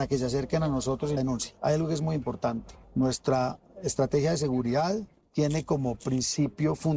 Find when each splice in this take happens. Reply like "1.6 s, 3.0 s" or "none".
1.2 s